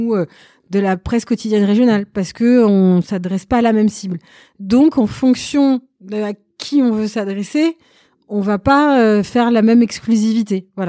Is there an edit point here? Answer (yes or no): no